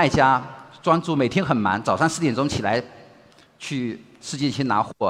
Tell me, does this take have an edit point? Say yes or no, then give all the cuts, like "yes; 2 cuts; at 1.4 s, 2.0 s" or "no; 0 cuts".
no; 0 cuts